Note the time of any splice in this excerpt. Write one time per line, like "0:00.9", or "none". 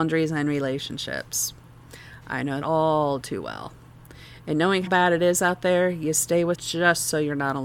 0:02.6
0:04.9
0:06.5